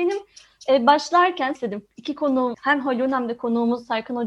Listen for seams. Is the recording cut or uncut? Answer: cut